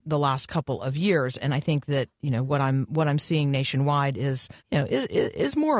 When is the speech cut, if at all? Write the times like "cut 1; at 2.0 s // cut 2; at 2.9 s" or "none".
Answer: cut 1; at 4.6 s